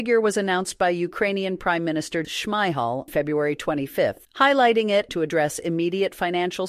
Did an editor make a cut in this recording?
yes; 4 cuts; at 2.2 s, 3.1 s, 4.2 s, 5.1 s

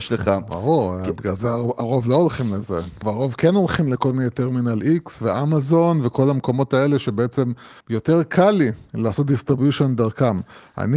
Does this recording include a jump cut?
yes; 2 cuts; at 3.0 s, 7.8 s

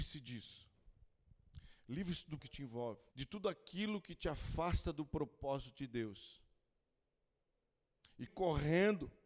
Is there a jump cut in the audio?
yes; 3 cuts; at 2.4 s, 3.1 s, 8.3 s

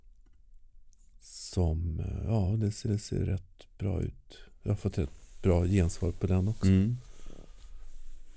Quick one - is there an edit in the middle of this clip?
yes; 1 cut; at 2.8 s

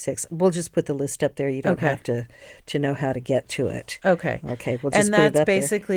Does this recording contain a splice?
no; 0 cuts

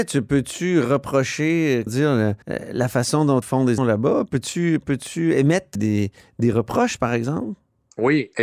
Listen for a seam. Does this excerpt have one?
yes; 5 cuts; at 1.9 s, 2.4 s, 3.4 s, 3.8 s, 5.7 s

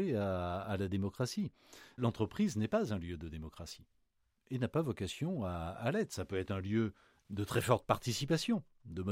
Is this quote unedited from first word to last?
yes; 0 cuts

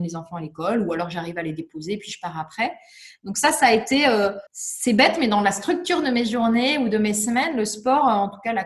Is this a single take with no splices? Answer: no; 1 cut; at 4.5 s

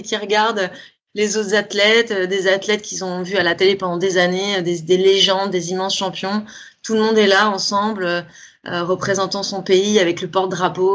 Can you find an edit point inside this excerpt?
no; 0 cuts

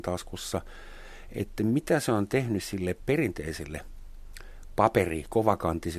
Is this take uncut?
yes; 0 cuts

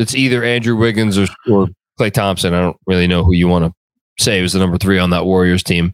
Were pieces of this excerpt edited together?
no; 0 cuts

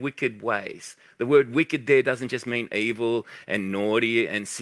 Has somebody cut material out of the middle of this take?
no; 0 cuts

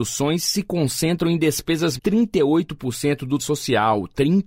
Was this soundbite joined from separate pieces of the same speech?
yes; 2 cuts; at 2.0 s, 3.4 s

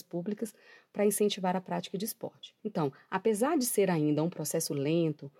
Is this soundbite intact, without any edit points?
no; 1 cut; at 2.6 s

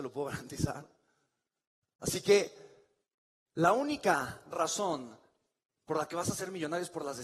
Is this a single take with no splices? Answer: yes; 0 cuts

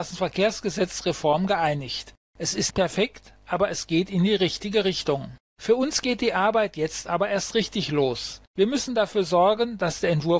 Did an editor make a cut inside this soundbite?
yes; 1 cut; at 2.7 s

